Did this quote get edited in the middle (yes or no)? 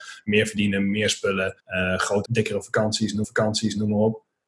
yes